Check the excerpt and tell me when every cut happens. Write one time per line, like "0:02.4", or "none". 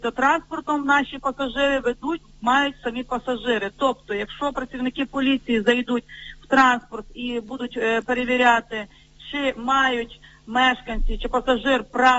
none